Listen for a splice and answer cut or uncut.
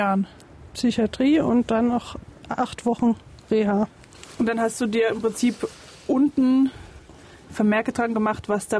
uncut